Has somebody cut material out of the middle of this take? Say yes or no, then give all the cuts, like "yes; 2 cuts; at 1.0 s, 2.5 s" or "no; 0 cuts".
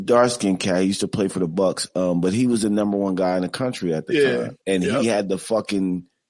yes; 1 cut; at 4.6 s